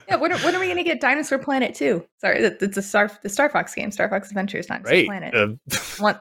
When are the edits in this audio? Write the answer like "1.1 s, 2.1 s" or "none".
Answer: 2.1 s, 2.7 s